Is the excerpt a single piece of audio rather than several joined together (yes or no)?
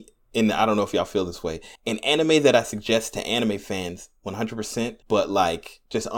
no